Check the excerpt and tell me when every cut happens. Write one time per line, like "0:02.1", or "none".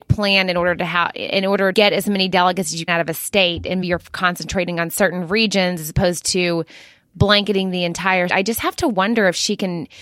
0:01.7
0:02.9
0:03.8
0:08.3